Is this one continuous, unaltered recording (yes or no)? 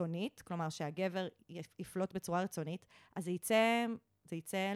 yes